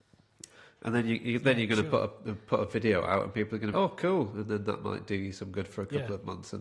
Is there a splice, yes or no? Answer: yes